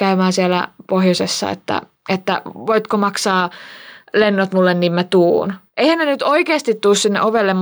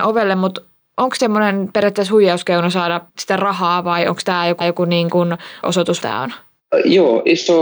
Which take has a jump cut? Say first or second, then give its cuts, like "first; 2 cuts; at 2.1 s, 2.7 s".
second; 5 cuts; at 1.2 s, 3.1 s, 4.6 s, 5.6 s, 6.0 s